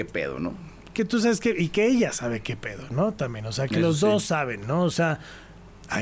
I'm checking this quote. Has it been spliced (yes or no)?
no